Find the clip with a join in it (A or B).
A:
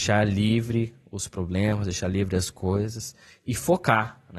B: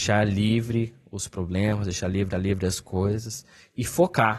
B